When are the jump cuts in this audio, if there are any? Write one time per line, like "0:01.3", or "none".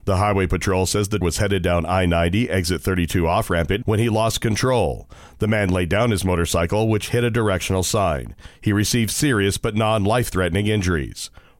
0:01.2
0:03.8